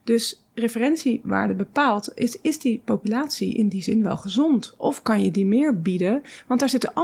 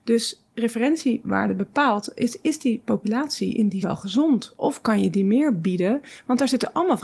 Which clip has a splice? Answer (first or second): second